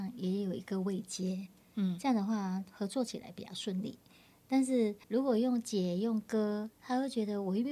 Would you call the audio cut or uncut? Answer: cut